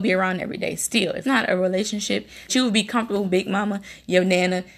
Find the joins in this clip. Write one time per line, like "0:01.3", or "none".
0:01.2
0:02.5
0:03.2